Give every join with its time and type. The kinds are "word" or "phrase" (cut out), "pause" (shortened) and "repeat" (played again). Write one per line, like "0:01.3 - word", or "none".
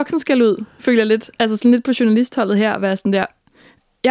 none